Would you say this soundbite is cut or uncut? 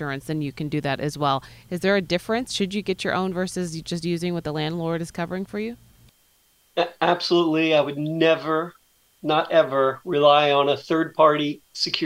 uncut